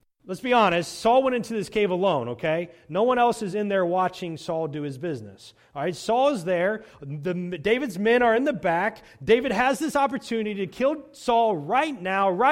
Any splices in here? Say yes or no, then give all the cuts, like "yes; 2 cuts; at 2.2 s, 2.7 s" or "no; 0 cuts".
no; 0 cuts